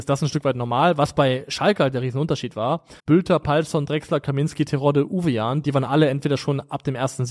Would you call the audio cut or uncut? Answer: cut